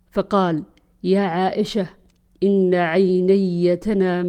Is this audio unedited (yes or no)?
yes